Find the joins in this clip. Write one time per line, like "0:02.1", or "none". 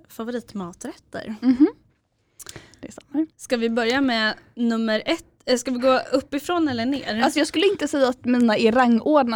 0:03.3